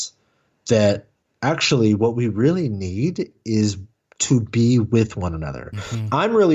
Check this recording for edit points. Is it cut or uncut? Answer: uncut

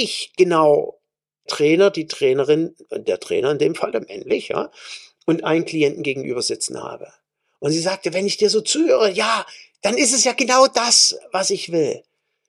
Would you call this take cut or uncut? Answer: cut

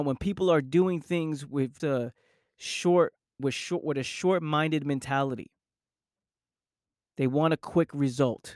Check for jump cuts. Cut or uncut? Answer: cut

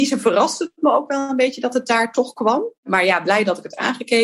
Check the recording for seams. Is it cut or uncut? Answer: cut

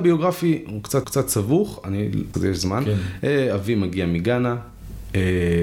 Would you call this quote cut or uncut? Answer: cut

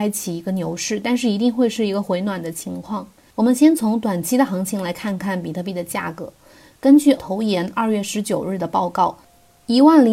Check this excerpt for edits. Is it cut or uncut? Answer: cut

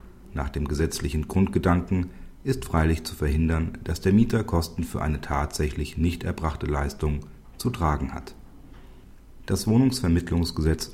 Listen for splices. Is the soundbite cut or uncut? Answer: uncut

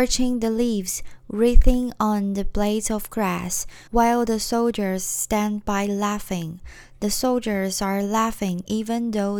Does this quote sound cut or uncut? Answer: cut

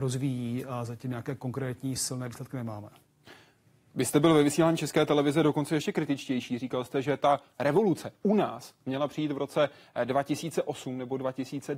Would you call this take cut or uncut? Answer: uncut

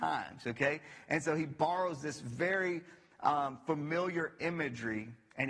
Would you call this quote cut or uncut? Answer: uncut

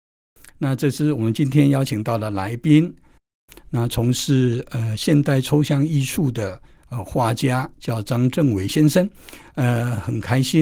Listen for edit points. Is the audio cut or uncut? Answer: uncut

